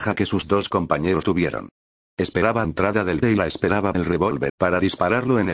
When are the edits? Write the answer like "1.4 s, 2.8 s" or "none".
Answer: 1.2 s, 2.6 s, 3.2 s, 3.9 s, 4.5 s